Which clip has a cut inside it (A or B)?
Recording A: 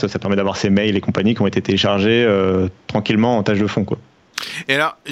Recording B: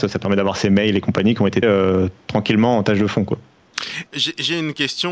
B